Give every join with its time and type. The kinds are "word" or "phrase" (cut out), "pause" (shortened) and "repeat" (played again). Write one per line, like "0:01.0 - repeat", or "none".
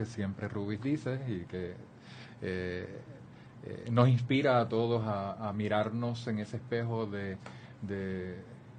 none